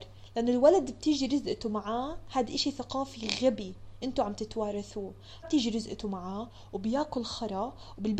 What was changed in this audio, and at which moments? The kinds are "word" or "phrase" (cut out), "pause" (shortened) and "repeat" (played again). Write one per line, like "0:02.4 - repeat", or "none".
0:05.4 - word